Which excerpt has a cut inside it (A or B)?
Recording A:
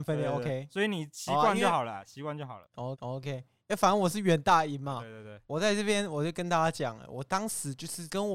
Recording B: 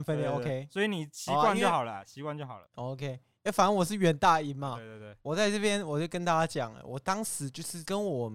A